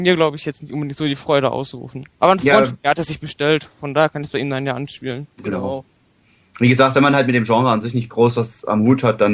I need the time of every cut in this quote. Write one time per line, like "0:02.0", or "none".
0:05.3